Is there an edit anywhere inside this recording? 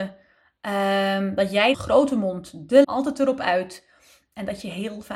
yes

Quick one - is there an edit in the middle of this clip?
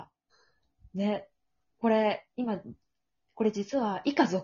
no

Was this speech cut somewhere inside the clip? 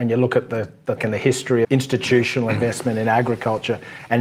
yes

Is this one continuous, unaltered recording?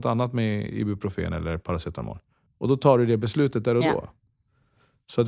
no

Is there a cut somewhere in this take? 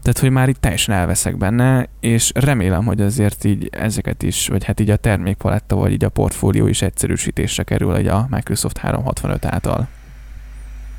no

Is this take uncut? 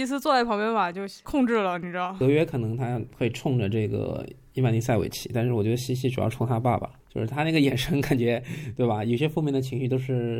no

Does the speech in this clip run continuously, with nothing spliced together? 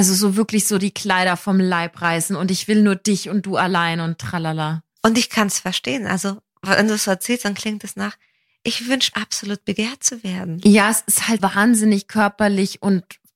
no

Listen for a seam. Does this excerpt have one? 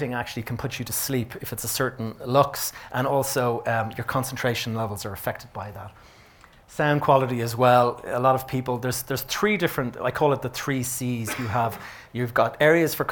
no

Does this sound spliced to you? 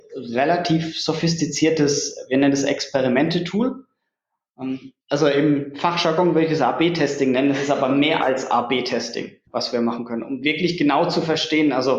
yes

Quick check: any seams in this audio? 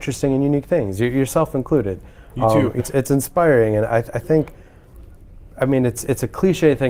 yes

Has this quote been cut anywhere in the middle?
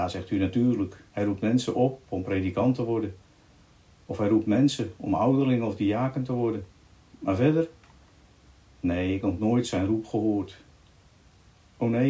yes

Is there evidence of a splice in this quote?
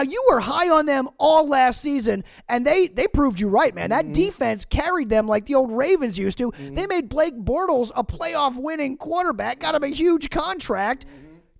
no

